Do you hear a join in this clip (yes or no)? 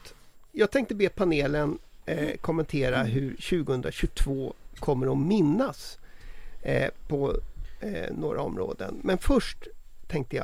no